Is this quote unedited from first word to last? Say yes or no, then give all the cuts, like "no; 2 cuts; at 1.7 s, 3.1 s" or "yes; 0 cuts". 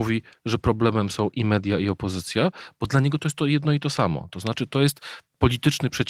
yes; 0 cuts